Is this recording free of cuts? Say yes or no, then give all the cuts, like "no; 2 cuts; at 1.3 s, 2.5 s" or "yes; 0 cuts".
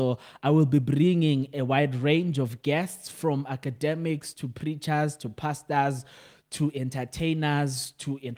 yes; 0 cuts